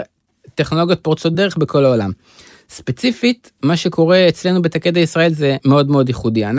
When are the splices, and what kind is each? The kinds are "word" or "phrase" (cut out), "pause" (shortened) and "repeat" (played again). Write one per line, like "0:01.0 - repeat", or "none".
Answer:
none